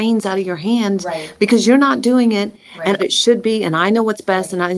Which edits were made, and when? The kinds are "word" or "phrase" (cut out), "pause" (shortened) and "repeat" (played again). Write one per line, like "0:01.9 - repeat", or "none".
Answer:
0:03.0 - phrase